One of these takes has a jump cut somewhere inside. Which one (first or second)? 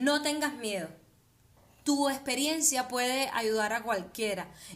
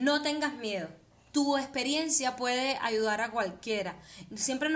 second